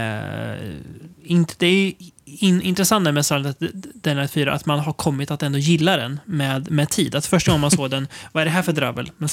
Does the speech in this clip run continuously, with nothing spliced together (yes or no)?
no